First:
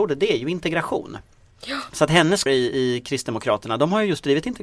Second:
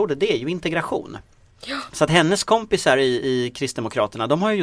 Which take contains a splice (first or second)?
first